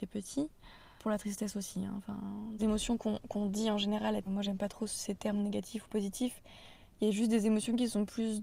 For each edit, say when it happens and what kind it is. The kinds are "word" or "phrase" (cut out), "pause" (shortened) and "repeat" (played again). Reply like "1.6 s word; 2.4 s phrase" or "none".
1.0 s word; 2.6 s phrase; 4.3 s phrase